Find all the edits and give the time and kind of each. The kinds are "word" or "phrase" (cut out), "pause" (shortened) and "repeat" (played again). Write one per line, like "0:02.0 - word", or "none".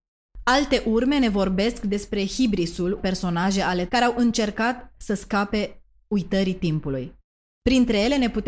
0:03.0 - word
0:03.9 - word